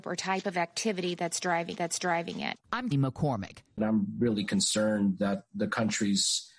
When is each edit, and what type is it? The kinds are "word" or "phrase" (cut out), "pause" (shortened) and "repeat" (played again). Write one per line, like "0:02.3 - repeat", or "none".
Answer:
0:01.7 - repeat
0:02.9 - word